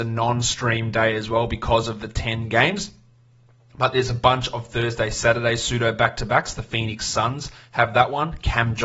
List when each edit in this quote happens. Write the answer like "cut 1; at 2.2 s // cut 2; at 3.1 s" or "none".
none